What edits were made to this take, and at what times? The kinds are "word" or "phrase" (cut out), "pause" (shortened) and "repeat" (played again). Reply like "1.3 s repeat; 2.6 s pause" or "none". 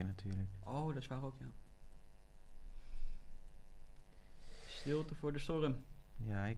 none